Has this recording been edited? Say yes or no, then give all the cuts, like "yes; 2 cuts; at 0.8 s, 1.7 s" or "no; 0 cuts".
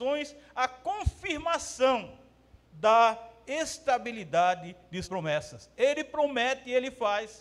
yes; 2 cuts; at 2.6 s, 5.0 s